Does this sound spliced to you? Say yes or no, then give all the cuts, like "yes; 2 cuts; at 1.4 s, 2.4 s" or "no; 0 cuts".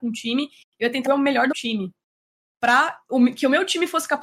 yes; 2 cuts; at 1.1 s, 1.5 s